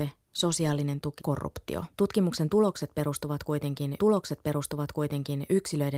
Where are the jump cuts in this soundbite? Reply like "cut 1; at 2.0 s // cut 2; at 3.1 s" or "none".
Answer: cut 1; at 1.2 s // cut 2; at 1.9 s // cut 3; at 4.0 s